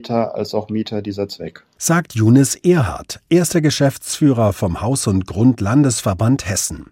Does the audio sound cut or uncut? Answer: uncut